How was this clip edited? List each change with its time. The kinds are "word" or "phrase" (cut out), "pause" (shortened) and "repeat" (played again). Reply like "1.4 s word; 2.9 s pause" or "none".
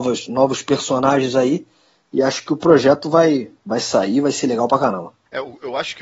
none